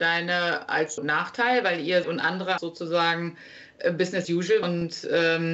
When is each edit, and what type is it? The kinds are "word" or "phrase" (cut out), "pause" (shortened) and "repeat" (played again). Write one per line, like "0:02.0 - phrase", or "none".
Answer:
0:01.0 - word
0:02.0 - phrase
0:02.6 - word
0:04.2 - word
0:04.6 - word